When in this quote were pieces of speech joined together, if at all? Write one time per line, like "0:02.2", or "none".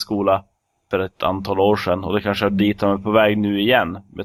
none